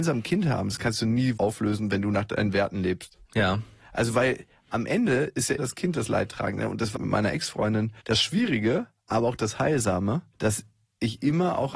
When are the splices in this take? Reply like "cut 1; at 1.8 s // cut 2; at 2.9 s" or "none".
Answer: cut 1; at 1.4 s // cut 2; at 3.2 s // cut 3; at 5.6 s // cut 4; at 6.9 s // cut 5; at 8.0 s // cut 6; at 10.3 s